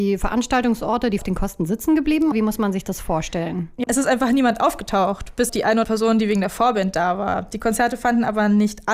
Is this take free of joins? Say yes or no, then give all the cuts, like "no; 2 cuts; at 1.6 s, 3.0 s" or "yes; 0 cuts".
no; 5 cuts; at 1.2 s, 2.3 s, 3.8 s, 5.5 s, 5.8 s